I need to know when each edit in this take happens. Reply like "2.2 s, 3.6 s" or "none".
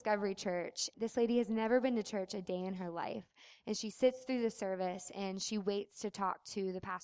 0.9 s